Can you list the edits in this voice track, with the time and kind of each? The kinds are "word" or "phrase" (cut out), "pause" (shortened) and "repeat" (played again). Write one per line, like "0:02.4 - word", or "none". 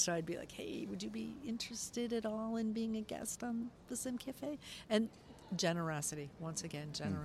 none

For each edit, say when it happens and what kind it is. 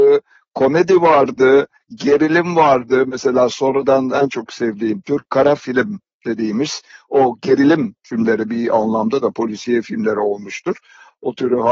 none

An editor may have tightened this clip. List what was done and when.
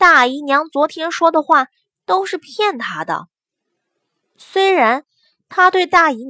none

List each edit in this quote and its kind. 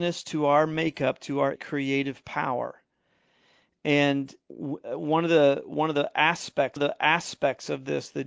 0:01.6 - phrase
0:04.4 - pause
0:06.8 - repeat

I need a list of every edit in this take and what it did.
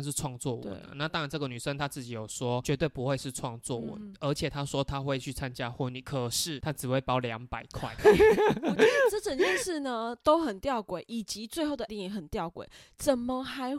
0:11.9 - word

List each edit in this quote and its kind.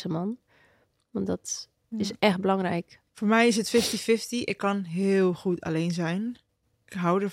0:03.1 - pause

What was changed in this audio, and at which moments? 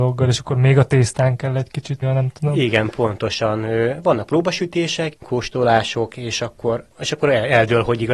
0:02.0 - word
0:05.2 - pause

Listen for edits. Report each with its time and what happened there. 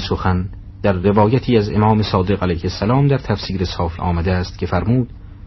0:04.0 - word

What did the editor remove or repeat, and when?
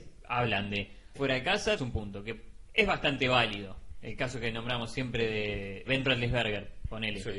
0:01.2 - phrase
0:01.8 - word
0:05.9 - word

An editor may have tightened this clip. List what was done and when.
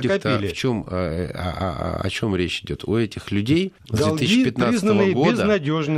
0:03.8 - pause

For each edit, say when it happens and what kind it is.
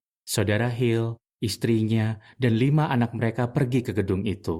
none

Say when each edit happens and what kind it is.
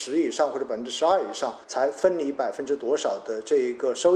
0:01.6 - pause

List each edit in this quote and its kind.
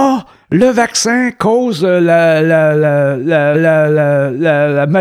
0:03.5 - repeat

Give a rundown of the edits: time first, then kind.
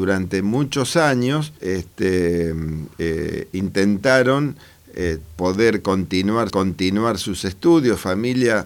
0:01.6 - pause
0:06.5 - repeat

